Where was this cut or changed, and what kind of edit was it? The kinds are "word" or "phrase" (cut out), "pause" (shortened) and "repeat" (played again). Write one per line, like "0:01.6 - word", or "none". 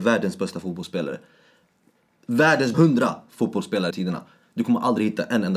0:02.7 - word
0:03.9 - word